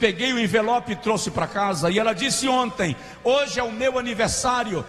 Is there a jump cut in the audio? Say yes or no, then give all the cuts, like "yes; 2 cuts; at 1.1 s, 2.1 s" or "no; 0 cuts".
no; 0 cuts